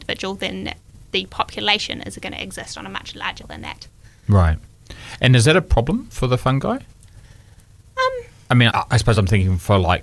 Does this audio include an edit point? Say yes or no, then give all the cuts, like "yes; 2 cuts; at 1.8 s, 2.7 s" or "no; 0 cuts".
yes; 3 cuts; at 3.4 s, 6.1 s, 8.7 s